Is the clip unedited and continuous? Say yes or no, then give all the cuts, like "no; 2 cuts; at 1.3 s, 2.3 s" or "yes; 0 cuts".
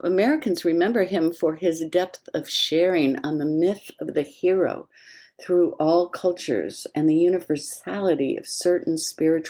yes; 0 cuts